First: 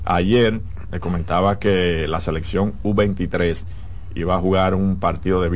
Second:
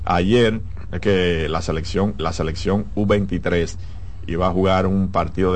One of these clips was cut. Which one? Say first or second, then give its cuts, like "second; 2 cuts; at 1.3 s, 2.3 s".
second; 2 cuts; at 1.0 s, 2.2 s